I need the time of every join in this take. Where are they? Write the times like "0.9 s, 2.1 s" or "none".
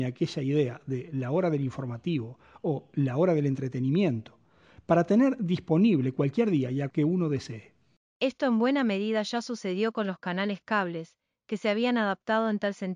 6.9 s